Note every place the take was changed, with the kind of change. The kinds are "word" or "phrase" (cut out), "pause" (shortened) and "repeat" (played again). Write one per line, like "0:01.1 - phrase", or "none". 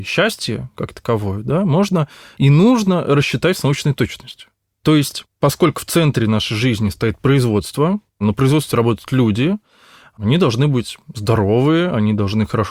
none